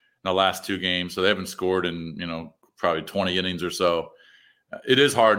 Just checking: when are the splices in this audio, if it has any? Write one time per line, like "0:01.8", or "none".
none